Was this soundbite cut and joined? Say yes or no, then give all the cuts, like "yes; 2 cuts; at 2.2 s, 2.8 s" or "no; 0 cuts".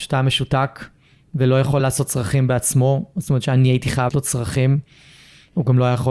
yes; 2 cuts; at 1.8 s, 4.1 s